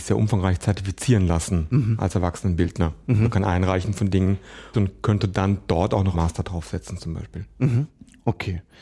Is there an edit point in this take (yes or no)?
yes